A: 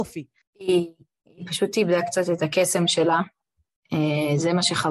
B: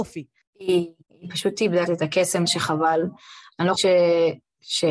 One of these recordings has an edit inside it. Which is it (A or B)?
B